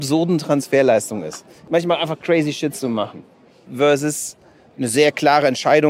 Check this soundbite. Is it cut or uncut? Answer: uncut